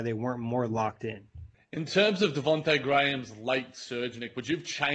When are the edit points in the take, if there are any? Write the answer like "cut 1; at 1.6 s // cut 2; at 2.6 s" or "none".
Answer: cut 1; at 1.5 s